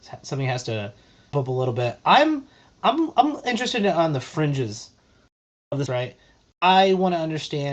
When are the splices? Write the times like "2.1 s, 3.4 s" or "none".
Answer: 1.3 s, 2.8 s, 5.9 s